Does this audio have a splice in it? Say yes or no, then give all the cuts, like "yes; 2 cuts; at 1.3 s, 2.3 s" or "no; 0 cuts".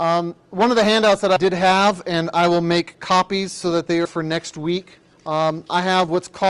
yes; 3 cuts; at 1.4 s, 4.1 s, 5.1 s